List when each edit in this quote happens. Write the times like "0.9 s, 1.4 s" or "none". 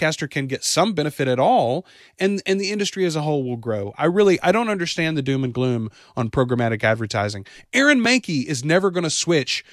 none